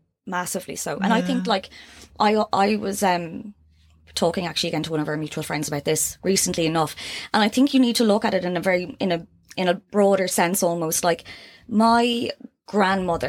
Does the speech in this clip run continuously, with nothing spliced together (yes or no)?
yes